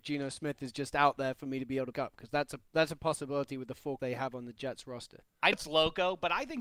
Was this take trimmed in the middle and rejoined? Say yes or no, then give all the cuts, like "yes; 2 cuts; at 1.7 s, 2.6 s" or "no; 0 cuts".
yes; 3 cuts; at 1.9 s, 4.0 s, 5.5 s